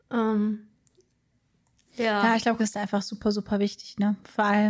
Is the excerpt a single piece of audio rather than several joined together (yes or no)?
no